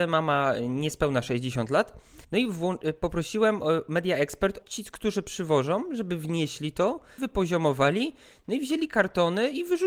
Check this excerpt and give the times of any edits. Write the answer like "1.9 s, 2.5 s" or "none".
2.2 s, 4.6 s, 7.2 s